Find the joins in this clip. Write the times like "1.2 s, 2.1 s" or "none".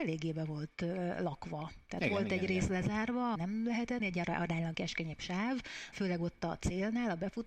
3.4 s, 4.0 s, 4.7 s, 5.9 s